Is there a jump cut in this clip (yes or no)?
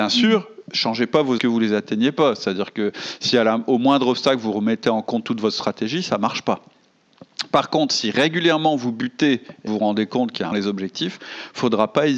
yes